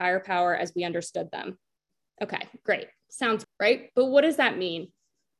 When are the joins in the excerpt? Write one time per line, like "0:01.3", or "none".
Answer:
0:03.4